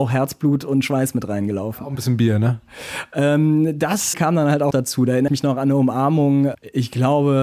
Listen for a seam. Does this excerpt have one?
yes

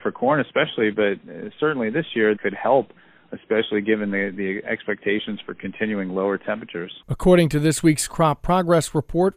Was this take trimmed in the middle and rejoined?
yes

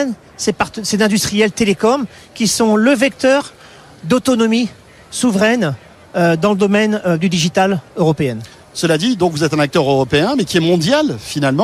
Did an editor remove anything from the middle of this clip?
no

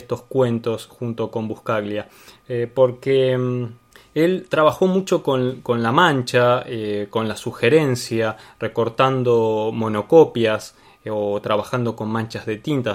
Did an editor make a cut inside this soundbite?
no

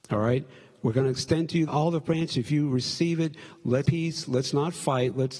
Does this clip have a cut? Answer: yes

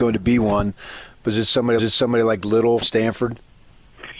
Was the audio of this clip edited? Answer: yes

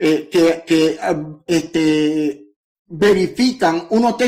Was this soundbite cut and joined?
no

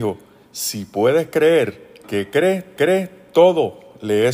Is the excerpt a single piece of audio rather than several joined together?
no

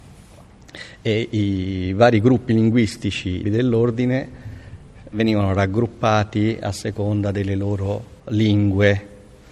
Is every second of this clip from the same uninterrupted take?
no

